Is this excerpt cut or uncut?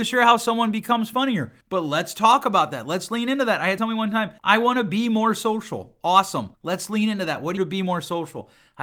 cut